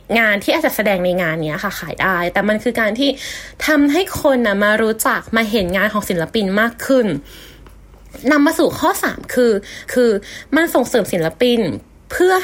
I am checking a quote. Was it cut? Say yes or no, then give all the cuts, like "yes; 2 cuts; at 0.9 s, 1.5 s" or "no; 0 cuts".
yes; 1 cut; at 9.9 s